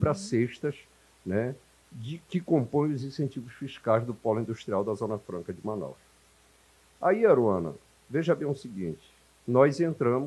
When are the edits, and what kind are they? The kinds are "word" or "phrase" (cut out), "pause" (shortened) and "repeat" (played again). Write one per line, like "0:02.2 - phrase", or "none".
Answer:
none

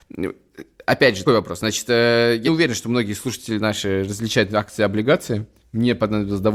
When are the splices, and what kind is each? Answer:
0:01.3 - word
0:02.5 - word

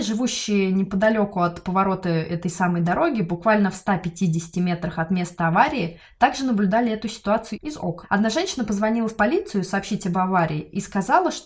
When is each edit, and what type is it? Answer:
none

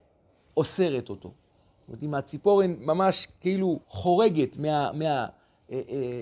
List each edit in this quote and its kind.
0:03.8 - pause

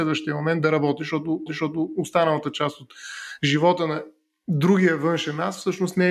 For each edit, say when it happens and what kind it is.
0:01.5 - repeat

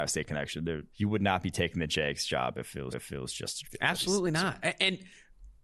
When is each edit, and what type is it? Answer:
0:00.9 - pause
0:02.9 - repeat
0:03.6 - phrase

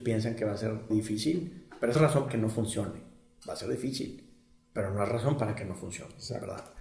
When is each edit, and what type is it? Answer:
0:00.9 - word
0:02.0 - word
0:02.3 - word

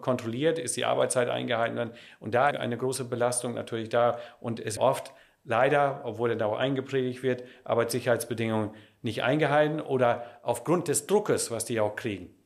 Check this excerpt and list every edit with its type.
0:02.5 - phrase
0:04.8 - word

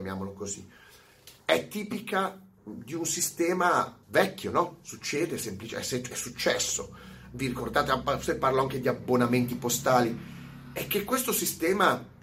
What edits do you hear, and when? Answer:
0:01.4 - pause
0:02.6 - pause
0:04.0 - pause

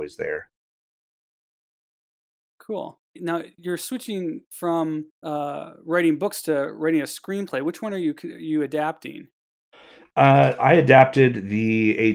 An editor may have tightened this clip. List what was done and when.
0:03.0 - pause
0:05.1 - pause

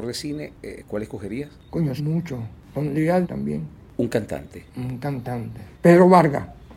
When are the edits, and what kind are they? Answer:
0:02.0 - word
0:03.2 - word
0:04.7 - pause
0:05.7 - pause

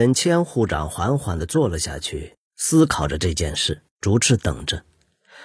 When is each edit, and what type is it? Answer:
0:02.4 - pause
0:03.9 - pause

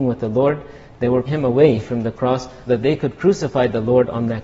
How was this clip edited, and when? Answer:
0:01.3 - word
0:02.7 - word

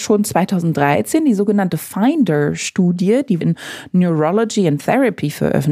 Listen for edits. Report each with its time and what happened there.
0:03.4 - word

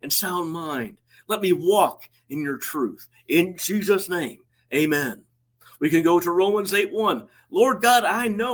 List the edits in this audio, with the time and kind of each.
none

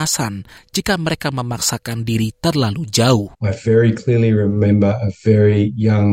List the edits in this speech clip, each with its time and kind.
0:03.3 - pause

